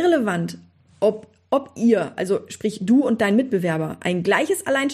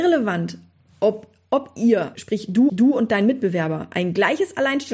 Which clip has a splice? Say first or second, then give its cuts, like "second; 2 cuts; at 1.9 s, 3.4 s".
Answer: second; 2 cuts; at 2.1 s, 2.7 s